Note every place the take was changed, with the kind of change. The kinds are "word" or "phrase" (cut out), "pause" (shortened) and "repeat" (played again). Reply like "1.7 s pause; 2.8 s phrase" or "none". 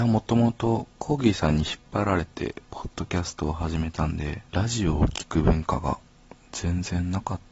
4.5 s pause

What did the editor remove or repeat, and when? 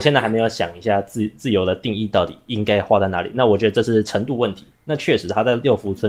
none

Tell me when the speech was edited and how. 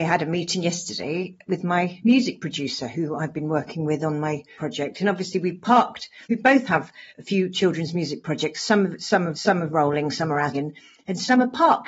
4.6 s phrase; 6.2 s pause; 7.1 s pause; 9.3 s repeat; 10.5 s phrase

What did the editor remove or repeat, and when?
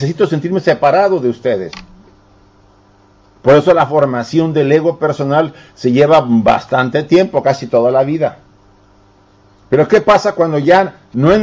none

